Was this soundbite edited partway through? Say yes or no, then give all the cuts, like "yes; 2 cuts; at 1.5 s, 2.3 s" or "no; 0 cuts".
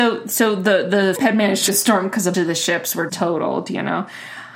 yes; 4 cuts; at 1.2 s, 1.7 s, 2.3 s, 3.1 s